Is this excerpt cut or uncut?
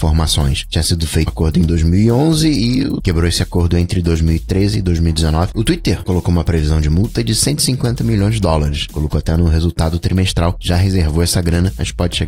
cut